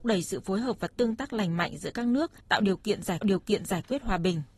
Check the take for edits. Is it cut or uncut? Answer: cut